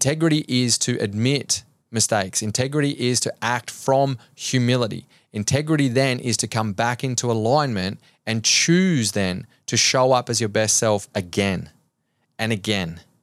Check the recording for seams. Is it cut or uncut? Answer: uncut